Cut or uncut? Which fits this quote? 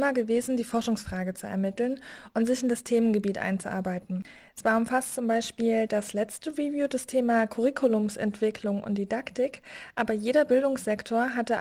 uncut